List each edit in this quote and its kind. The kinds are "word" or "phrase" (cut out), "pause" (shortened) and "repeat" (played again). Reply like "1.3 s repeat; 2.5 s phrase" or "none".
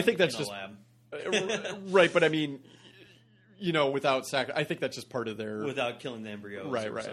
none